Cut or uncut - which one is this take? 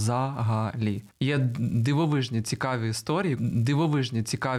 cut